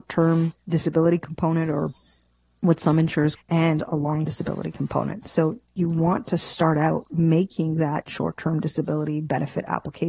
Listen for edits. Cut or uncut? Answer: cut